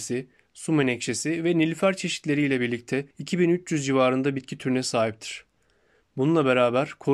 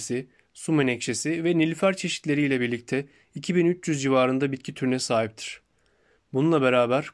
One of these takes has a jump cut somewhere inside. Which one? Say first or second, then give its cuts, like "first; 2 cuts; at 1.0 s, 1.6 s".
first; 1 cut; at 3.1 s